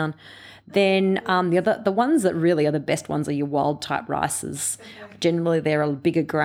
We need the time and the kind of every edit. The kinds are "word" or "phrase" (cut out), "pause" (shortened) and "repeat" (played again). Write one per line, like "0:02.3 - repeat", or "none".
none